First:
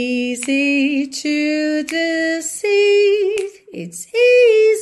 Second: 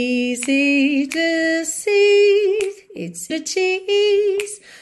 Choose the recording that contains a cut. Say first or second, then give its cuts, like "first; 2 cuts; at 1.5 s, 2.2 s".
second; 2 cuts; at 1.1 s, 3.3 s